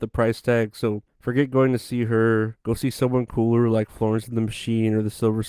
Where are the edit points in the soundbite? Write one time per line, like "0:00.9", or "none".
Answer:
0:01.1
0:02.6